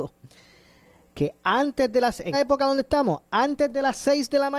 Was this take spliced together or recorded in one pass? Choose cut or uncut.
cut